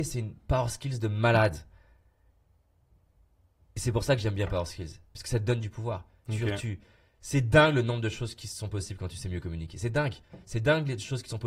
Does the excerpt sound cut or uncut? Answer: uncut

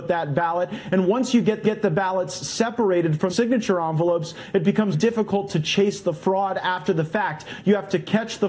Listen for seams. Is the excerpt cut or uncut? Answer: cut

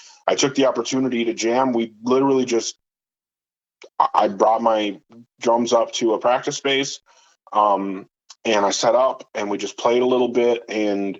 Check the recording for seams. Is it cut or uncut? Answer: uncut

